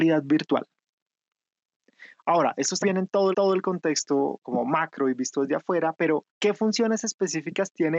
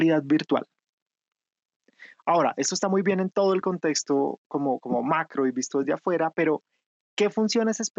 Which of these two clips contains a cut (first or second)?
first